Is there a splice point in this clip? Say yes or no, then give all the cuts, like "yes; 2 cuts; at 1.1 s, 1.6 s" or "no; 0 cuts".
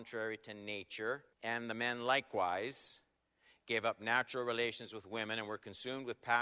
yes; 2 cuts; at 1.3 s, 3.2 s